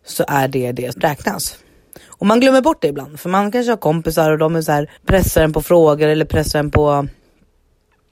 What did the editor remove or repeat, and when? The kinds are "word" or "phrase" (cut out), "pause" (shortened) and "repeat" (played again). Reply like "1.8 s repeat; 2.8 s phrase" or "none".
0.9 s word; 1.9 s pause; 5.0 s pause